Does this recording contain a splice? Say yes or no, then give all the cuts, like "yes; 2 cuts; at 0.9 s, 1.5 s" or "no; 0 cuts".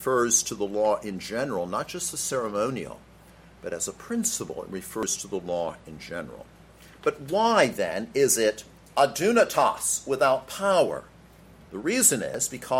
no; 0 cuts